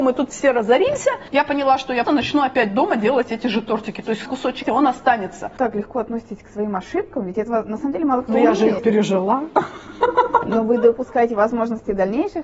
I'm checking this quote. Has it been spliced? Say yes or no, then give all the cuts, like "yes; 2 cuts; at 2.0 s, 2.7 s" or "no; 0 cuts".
yes; 4 cuts; at 2.0 s, 4.3 s, 4.6 s, 8.8 s